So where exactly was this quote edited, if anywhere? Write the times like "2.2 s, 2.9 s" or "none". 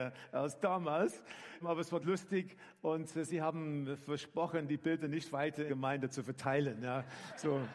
1.6 s, 2.0 s, 5.7 s